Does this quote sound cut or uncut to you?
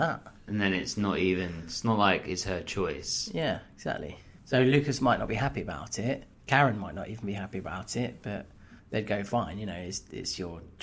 cut